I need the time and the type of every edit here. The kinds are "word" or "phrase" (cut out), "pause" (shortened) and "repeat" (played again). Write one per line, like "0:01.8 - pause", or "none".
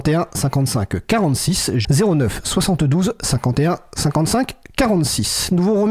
0:01.8 - word